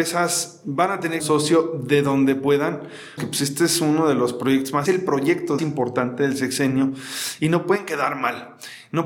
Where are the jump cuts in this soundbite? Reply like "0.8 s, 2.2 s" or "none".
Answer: 1.2 s, 3.2 s, 4.9 s, 5.6 s